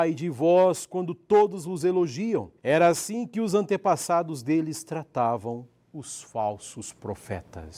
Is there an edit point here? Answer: yes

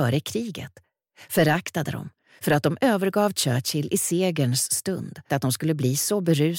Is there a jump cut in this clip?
yes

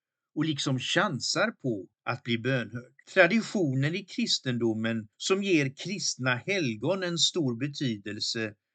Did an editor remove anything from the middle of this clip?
yes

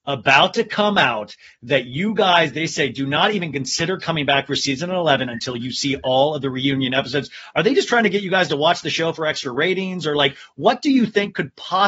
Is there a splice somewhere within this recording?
no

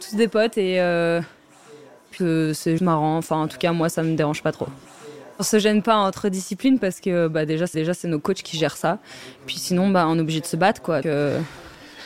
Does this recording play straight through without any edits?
no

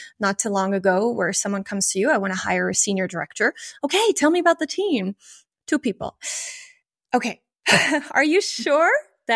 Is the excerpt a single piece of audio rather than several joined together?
yes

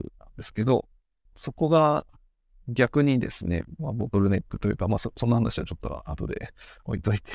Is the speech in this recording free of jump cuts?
yes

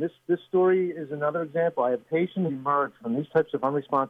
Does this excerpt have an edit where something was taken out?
yes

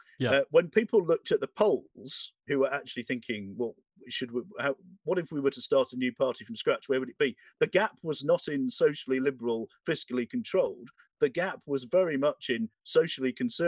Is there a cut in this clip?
no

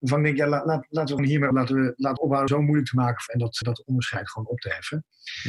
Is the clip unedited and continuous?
no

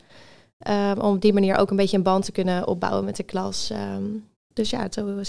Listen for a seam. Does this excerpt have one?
no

